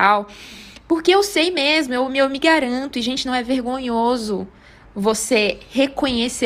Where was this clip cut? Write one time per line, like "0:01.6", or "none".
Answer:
none